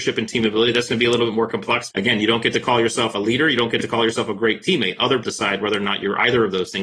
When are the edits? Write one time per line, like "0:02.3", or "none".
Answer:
0:01.9
0:03.1
0:05.2